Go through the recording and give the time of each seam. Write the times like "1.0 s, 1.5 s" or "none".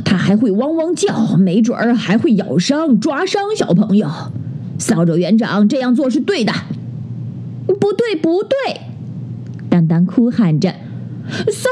none